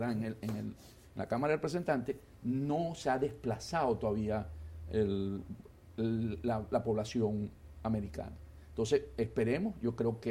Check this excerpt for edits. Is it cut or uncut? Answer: uncut